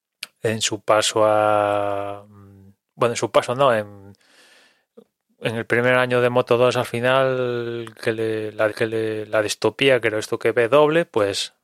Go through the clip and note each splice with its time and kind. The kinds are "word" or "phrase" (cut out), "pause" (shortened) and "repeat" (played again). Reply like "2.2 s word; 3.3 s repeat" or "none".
8.7 s repeat